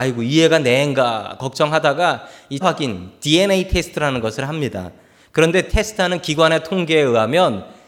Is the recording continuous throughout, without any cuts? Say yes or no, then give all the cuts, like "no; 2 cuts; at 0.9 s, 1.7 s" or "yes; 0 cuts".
no; 2 cuts; at 2.6 s, 5.7 s